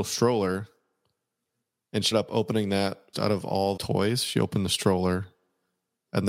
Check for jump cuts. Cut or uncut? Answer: cut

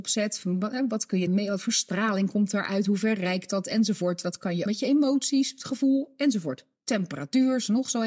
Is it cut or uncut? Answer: cut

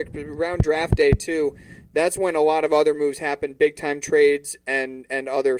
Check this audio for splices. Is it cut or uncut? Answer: uncut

